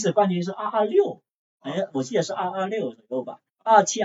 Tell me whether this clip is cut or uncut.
uncut